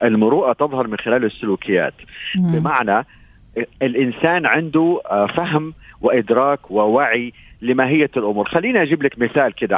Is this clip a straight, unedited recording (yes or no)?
yes